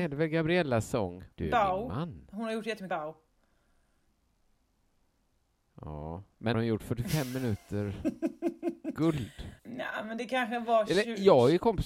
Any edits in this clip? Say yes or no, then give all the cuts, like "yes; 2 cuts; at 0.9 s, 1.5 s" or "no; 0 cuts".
yes; 4 cuts; at 1.3 s, 2.9 s, 6.5 s, 9.6 s